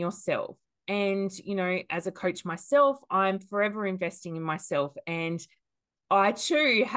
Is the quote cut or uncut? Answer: uncut